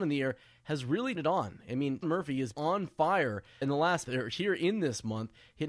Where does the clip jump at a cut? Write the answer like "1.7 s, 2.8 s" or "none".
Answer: 1.2 s, 2.0 s, 2.5 s, 3.6 s, 4.0 s